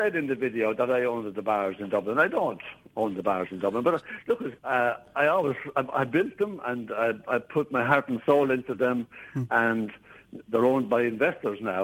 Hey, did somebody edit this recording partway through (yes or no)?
yes